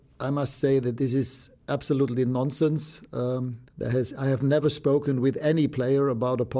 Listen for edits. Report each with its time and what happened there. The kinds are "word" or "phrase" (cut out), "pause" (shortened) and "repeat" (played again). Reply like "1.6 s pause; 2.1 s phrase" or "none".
3.7 s pause